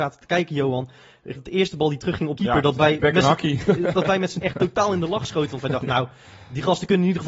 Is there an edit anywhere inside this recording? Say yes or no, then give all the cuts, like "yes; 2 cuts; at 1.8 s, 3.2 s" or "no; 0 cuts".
yes; 4 cuts; at 1.4 s, 2.4 s, 3.0 s, 4.4 s